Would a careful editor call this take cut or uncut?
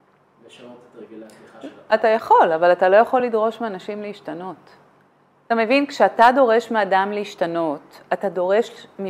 uncut